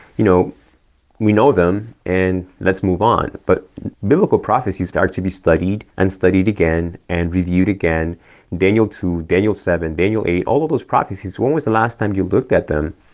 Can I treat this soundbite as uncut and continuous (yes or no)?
no